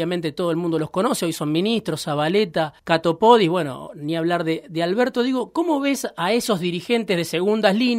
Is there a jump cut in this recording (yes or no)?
yes